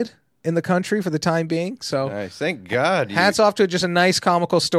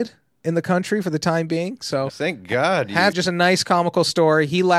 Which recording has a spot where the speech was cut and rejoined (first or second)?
second